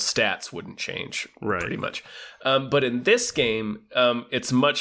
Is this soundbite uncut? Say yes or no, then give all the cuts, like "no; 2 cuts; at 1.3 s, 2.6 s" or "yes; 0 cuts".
yes; 0 cuts